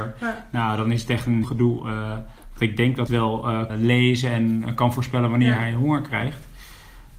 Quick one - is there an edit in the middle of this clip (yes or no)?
yes